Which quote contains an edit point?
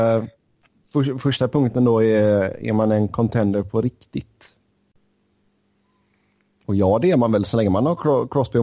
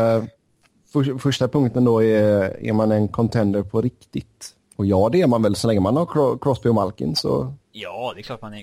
second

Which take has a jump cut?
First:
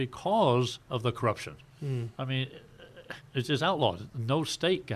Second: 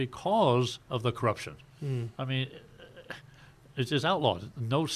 first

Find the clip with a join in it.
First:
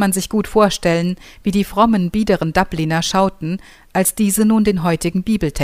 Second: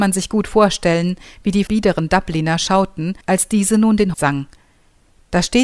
second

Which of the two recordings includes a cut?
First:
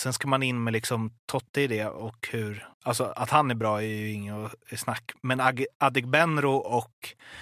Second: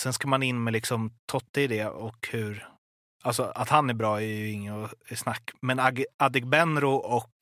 first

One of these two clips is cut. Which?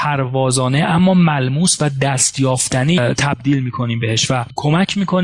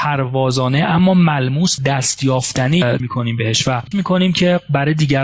second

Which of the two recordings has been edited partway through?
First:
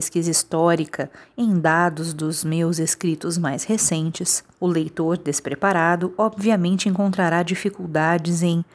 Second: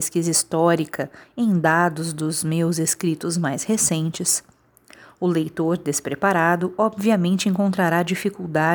first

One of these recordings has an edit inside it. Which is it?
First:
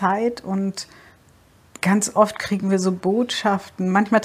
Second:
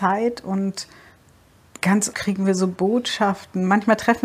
second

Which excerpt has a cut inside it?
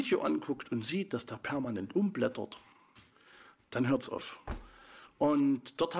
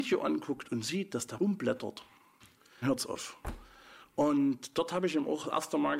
second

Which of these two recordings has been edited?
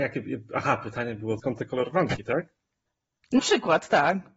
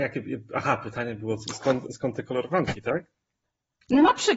first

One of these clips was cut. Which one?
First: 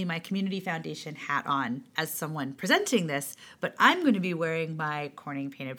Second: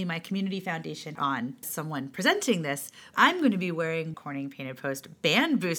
second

